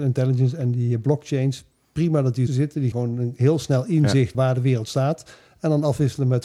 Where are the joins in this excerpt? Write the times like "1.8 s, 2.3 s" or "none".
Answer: 2.5 s, 2.9 s, 4.3 s